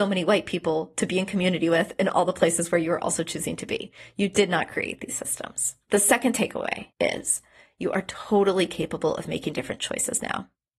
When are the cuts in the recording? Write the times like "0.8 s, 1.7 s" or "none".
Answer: 5.8 s, 6.9 s

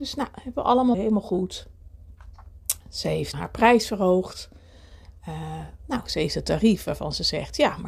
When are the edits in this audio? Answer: 0.9 s, 3.3 s

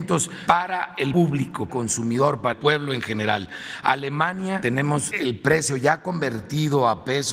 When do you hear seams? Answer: 1.7 s, 2.5 s

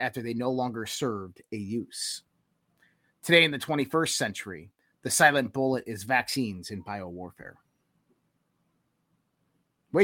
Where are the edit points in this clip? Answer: none

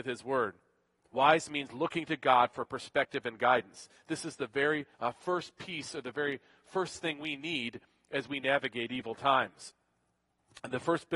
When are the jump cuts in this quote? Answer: 4.9 s

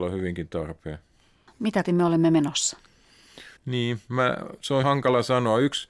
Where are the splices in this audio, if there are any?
1.8 s, 3.6 s, 4.8 s

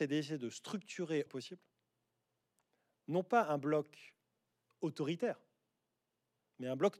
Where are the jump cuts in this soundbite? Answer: 1.3 s

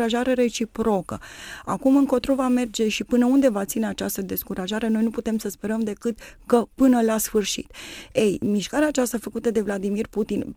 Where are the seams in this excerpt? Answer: none

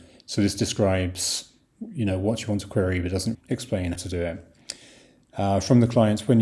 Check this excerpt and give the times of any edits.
3.3 s, 4.0 s

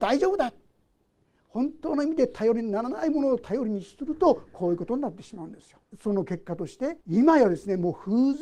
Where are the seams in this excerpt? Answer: 5.8 s, 7.0 s

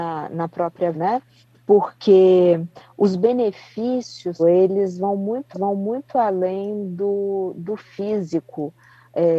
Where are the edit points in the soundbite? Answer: 0.9 s, 1.4 s, 4.4 s, 5.5 s

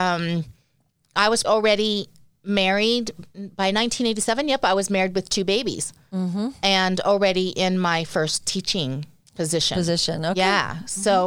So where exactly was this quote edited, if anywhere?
1.4 s

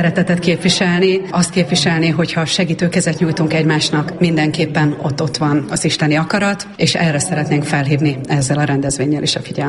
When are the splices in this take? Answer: none

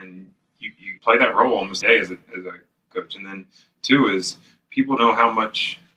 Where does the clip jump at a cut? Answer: 1.0 s, 1.8 s, 2.9 s, 5.0 s

